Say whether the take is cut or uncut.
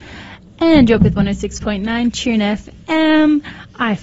cut